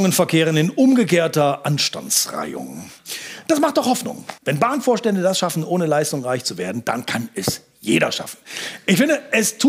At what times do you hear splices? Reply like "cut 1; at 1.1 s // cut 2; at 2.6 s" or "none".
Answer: cut 1; at 4.4 s